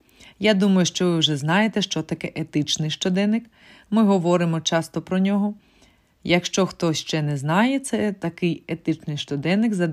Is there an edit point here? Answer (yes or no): no